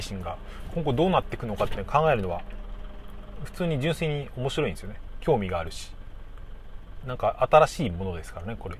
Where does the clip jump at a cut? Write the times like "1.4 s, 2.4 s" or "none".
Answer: 7.0 s